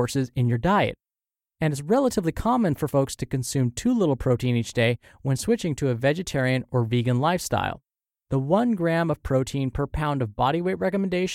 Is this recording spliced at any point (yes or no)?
no